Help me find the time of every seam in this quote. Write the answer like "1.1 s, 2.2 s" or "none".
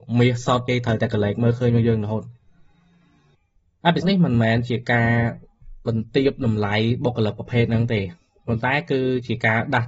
4.0 s